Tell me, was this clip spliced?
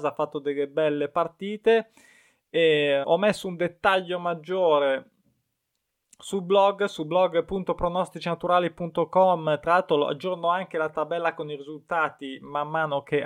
yes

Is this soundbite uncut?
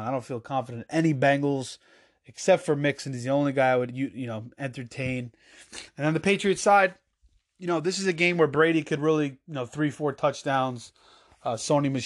yes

